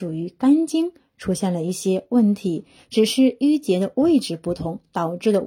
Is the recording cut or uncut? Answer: uncut